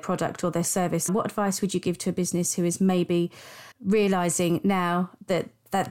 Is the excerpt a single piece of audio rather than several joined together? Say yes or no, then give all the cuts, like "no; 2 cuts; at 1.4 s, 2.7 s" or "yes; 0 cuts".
no; 2 cuts; at 1.1 s, 3.7 s